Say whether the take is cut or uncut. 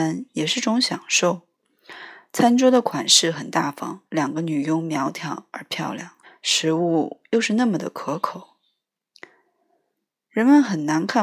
cut